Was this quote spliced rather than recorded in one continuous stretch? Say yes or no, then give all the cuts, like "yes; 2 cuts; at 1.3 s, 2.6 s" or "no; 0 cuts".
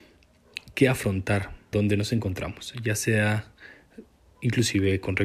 yes; 1 cut; at 1.7 s